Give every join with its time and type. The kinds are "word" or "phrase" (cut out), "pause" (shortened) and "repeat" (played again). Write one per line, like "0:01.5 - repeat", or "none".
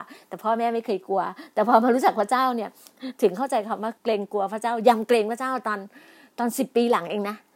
0:04.0 - pause